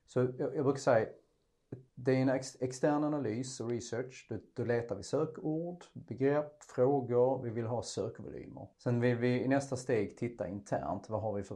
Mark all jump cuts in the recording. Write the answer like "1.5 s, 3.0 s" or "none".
1.9 s, 8.7 s